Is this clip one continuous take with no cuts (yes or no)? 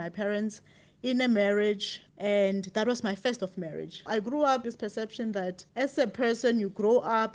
no